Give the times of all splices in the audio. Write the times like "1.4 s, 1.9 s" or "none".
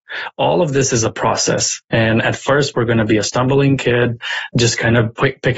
none